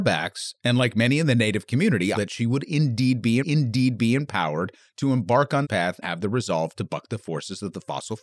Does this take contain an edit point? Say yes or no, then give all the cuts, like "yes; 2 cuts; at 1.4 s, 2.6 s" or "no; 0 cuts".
yes; 4 cuts; at 2.1 s, 3.4 s, 5.6 s, 6.0 s